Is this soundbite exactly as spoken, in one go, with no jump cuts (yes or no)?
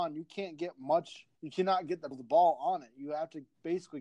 no